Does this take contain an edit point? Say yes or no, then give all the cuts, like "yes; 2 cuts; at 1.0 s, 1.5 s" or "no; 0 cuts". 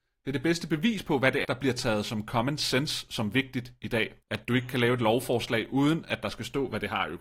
yes; 2 cuts; at 1.4 s, 4.2 s